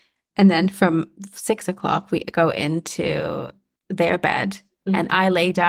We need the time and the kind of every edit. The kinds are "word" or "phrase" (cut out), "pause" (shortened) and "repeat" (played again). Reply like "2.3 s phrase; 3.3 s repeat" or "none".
none